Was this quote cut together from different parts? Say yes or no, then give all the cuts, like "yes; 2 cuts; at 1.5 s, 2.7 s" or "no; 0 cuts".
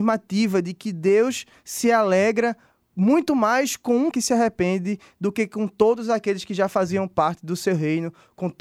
yes; 1 cut; at 4.1 s